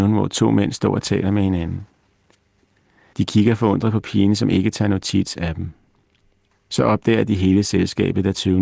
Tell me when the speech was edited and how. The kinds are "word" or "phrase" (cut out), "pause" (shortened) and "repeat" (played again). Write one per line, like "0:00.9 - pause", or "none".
none